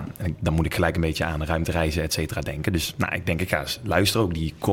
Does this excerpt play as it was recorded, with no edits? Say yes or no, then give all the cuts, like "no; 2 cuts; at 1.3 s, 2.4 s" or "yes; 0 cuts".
yes; 0 cuts